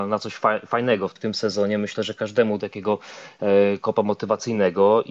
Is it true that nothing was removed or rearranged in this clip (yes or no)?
no